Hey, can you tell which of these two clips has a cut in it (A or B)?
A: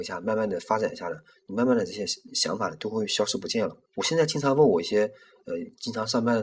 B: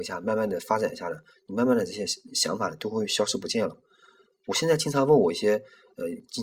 A